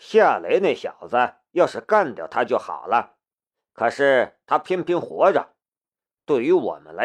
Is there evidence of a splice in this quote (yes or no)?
no